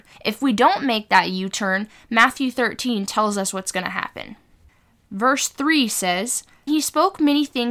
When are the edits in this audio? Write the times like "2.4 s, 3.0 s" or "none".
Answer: 6.7 s

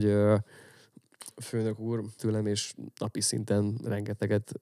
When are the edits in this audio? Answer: 2.2 s

